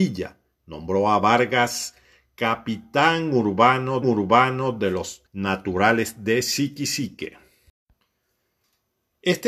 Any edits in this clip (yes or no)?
yes